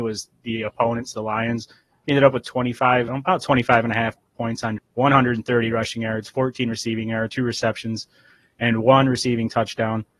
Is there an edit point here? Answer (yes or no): yes